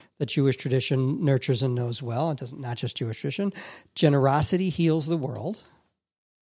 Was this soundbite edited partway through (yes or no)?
no